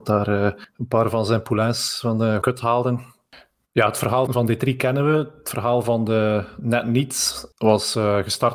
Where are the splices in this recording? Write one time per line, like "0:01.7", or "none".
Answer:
0:02.4
0:04.3